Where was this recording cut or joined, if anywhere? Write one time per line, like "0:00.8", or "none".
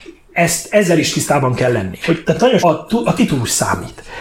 0:02.2
0:02.6